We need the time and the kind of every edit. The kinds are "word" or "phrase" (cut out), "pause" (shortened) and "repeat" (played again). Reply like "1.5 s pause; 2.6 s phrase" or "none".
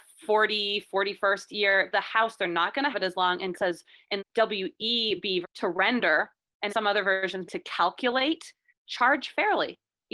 1.9 s word; 2.9 s word; 3.5 s word; 4.2 s word; 5.4 s word; 6.7 s word; 7.5 s word; 8.7 s word